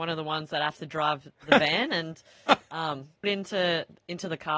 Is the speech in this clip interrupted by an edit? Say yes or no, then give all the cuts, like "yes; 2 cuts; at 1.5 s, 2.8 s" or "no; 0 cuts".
yes; 1 cut; at 3.2 s